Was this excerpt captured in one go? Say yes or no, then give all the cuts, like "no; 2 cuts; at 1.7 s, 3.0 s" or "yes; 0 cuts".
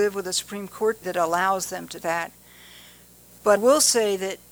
no; 3 cuts; at 1.0 s, 2.0 s, 3.6 s